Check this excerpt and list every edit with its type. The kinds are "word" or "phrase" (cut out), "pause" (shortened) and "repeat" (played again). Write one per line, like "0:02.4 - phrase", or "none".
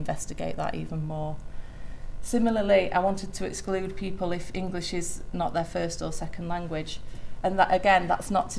none